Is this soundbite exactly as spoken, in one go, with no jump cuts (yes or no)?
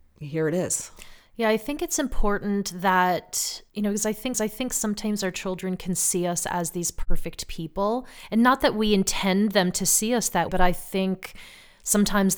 no